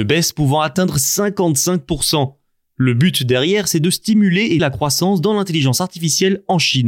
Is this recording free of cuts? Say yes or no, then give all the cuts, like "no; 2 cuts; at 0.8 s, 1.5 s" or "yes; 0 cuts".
no; 1 cut; at 4.6 s